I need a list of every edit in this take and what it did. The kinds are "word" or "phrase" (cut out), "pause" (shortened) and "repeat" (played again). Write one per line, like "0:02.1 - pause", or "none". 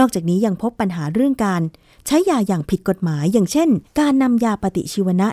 0:03.9 - pause